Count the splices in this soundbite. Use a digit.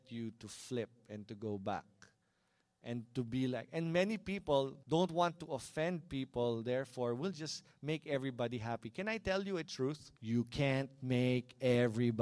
2